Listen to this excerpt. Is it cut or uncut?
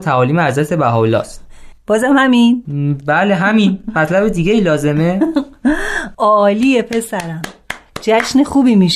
uncut